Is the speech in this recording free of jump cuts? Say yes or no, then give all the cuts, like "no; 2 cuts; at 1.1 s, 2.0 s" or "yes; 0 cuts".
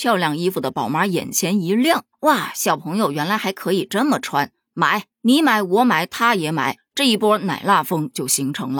no; 2 cuts; at 2.1 s, 5.1 s